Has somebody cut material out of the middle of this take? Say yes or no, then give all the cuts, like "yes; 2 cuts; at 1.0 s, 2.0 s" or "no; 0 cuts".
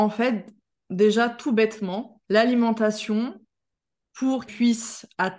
yes; 2 cuts; at 2.2 s, 4.5 s